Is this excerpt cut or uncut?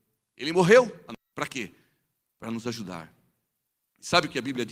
cut